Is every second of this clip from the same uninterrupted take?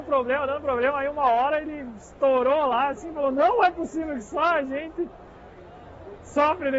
yes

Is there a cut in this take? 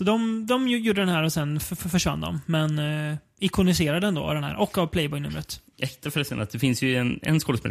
yes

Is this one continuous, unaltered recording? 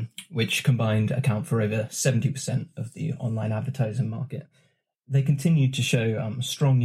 yes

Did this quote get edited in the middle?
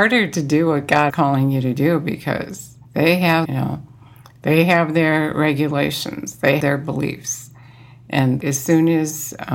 yes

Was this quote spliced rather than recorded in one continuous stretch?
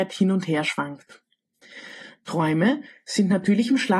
no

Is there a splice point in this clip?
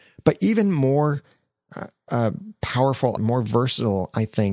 yes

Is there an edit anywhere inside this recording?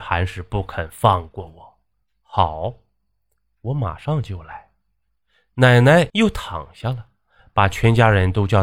no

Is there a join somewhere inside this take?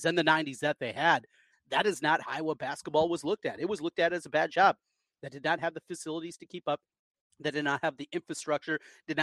yes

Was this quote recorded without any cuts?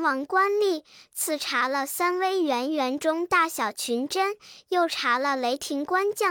yes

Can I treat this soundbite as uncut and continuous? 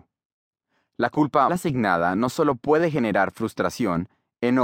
no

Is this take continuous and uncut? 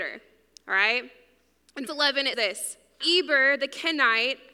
no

